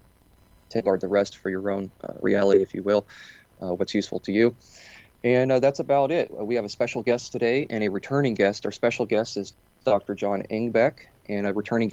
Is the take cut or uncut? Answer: uncut